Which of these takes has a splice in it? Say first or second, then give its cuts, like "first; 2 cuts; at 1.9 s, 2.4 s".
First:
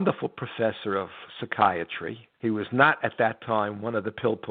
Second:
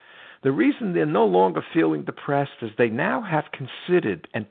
first; 1 cut; at 2.3 s